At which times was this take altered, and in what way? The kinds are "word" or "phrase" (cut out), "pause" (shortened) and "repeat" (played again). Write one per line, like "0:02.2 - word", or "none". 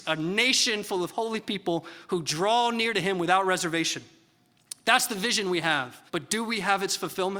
0:06.1 - pause